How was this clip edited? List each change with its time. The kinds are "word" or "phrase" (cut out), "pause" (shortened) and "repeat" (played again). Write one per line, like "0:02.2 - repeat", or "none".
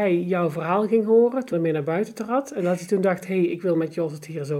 0:01.5 - word

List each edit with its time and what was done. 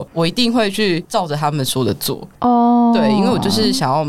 0:02.4 - pause

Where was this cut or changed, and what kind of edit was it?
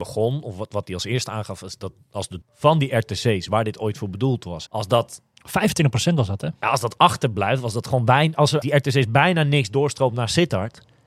0:02.4 - word
0:04.7 - word
0:08.6 - word

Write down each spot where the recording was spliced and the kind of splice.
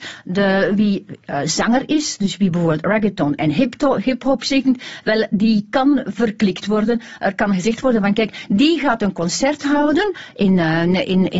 none

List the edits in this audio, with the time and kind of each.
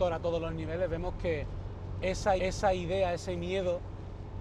0:02.4 - repeat

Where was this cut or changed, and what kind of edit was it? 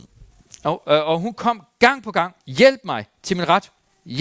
0:02.4 - pause

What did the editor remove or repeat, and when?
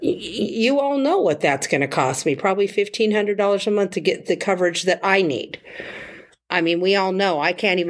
none

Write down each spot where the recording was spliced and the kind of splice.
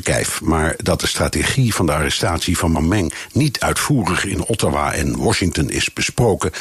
0:02.7 - word

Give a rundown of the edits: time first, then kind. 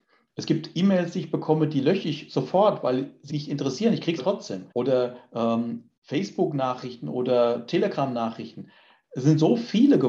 0:03.3 - word
0:04.2 - phrase
0:04.7 - pause
0:06.0 - pause

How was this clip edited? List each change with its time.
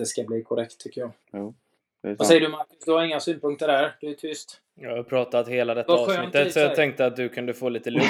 0:01.2 - pause

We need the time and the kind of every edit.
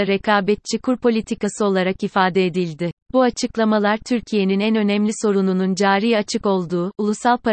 0:03.0 - pause

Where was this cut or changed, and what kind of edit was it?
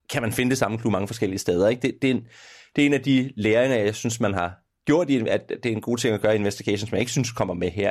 none

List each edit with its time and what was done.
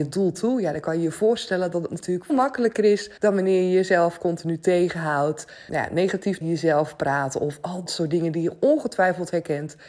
0:02.3 - word
0:03.2 - pause
0:05.7 - word
0:06.4 - word
0:07.9 - word

